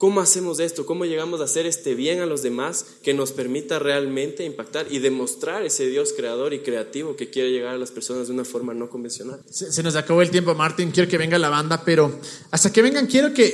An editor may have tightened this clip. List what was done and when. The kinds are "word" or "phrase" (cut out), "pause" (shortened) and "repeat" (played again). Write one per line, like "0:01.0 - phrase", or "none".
0:09.4 - pause